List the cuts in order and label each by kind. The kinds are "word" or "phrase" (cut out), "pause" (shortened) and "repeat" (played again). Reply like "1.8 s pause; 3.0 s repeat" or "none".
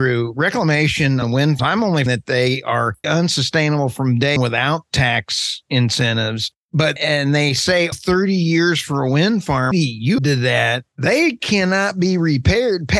1.2 s word; 1.6 s word; 2.1 s word; 3.0 s word; 4.4 s word; 7.0 s word; 7.9 s word; 9.7 s word; 10.2 s word